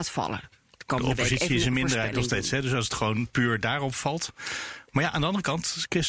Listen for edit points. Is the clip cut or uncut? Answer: uncut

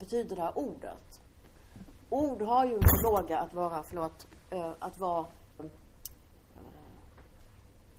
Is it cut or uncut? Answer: cut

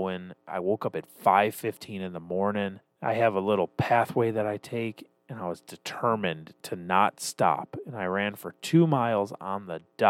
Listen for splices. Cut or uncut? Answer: cut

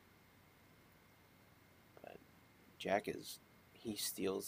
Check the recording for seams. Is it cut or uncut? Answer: uncut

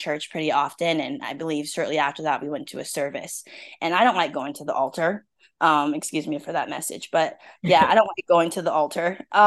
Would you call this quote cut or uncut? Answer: uncut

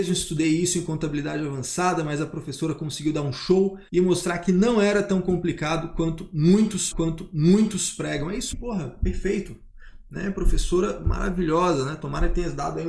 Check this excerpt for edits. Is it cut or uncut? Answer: cut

